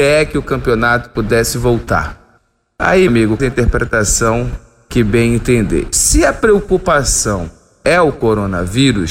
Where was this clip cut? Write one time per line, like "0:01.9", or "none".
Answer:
0:03.1
0:03.4